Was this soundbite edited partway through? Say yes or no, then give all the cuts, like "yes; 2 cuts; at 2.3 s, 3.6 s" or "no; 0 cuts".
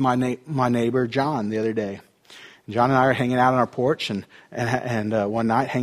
no; 0 cuts